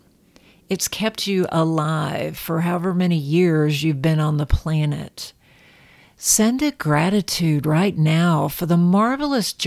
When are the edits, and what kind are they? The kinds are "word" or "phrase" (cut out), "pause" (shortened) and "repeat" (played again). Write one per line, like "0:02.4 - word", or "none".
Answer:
none

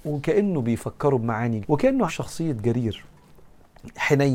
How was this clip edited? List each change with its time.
0:01.6 - word
0:02.1 - word

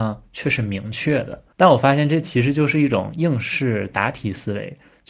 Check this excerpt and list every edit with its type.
0:01.5 - pause

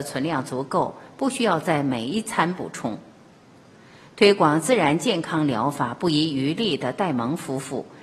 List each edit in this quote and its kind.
none

